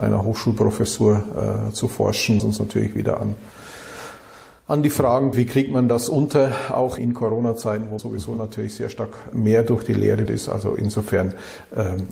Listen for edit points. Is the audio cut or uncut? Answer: cut